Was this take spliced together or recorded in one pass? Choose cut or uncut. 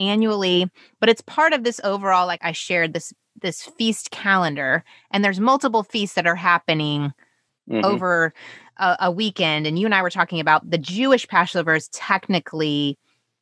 cut